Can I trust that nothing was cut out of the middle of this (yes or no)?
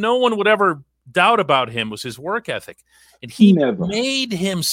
yes